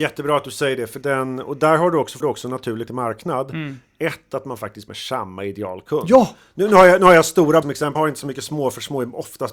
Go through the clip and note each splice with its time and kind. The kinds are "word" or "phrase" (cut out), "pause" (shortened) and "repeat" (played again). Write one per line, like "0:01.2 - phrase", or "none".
0:01.0 - word
0:02.2 - word
0:02.9 - word
0:04.9 - word
0:07.6 - word
0:07.9 - word